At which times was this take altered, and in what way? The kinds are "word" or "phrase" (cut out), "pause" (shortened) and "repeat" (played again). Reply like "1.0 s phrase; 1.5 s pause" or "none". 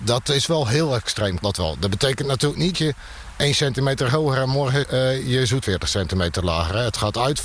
1.4 s word; 2.7 s word; 4.8 s word; 5.6 s word